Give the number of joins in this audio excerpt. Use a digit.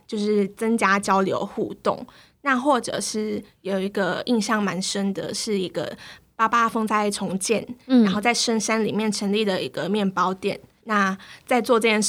0